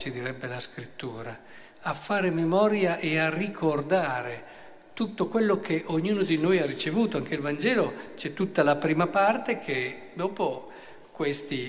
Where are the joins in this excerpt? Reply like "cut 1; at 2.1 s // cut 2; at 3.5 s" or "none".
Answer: none

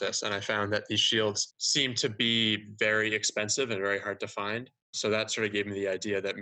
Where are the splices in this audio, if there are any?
none

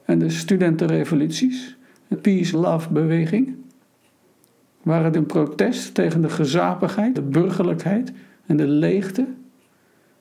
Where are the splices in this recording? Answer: cut 1; at 2.1 s // cut 2; at 2.5 s // cut 3; at 5.1 s // cut 4; at 7.1 s

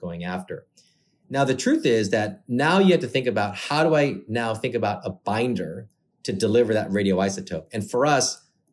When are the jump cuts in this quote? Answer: none

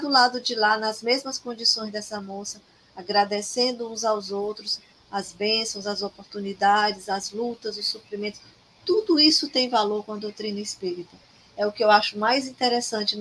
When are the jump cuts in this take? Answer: none

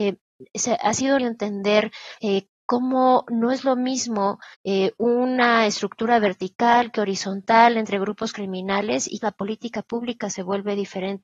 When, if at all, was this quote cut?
cut 1; at 1.2 s // cut 2; at 2.2 s // cut 3; at 4.5 s // cut 4; at 9.2 s

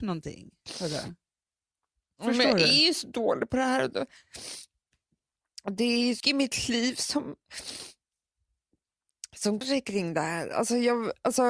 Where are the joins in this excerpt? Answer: cut 1; at 1.8 s // cut 2; at 6.2 s // cut 3; at 9.6 s

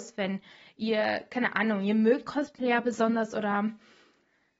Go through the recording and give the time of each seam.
cut 1; at 2.3 s

